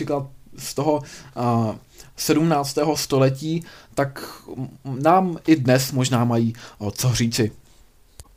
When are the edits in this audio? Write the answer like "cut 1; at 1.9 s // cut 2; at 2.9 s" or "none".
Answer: none